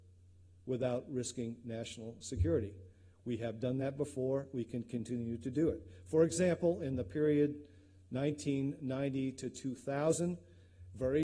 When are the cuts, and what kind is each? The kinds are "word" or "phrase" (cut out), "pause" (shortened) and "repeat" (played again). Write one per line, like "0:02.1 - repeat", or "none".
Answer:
none